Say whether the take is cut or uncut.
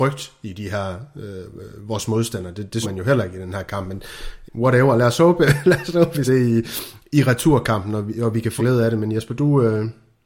cut